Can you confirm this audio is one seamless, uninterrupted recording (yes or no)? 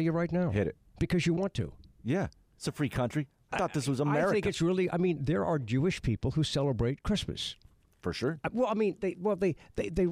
yes